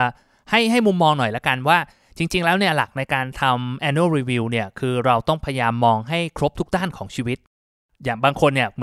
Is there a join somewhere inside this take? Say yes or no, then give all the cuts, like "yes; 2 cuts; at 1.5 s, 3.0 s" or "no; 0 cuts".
no; 0 cuts